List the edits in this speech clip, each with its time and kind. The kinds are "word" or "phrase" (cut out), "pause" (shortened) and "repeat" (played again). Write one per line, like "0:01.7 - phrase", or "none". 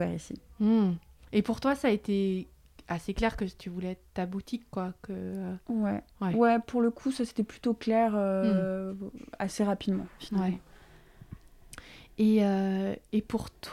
none